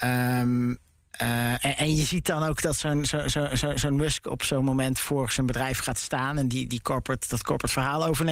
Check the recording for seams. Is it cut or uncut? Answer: uncut